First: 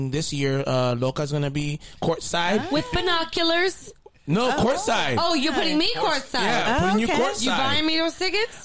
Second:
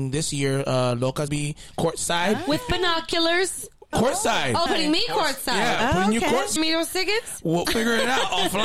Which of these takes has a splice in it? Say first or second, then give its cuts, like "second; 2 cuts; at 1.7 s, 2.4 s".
second; 5 cuts; at 1.3 s, 3.9 s, 4.7 s, 6.6 s, 7.6 s